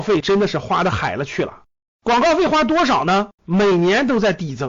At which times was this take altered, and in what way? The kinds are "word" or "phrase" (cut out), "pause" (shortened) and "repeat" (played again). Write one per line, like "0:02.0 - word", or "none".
0:01.9 - pause
0:03.3 - pause